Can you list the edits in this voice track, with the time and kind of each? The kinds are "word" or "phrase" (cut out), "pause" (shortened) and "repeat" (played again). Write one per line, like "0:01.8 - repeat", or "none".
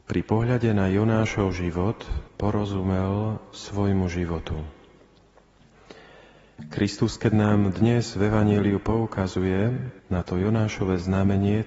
0:02.3 - pause
0:10.0 - pause